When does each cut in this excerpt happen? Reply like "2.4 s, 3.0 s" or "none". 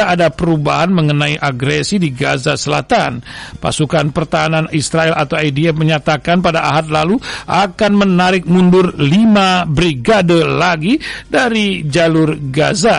none